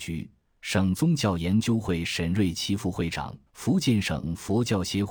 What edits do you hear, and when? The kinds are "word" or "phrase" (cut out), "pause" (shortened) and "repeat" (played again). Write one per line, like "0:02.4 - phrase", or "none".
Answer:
0:03.5 - pause